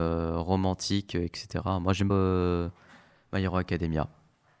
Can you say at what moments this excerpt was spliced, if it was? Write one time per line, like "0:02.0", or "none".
0:02.1